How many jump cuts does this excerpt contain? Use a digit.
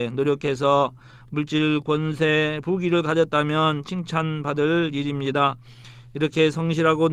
0